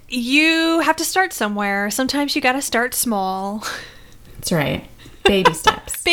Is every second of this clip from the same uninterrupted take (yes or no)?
yes